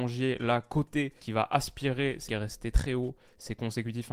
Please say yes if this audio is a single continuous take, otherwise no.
no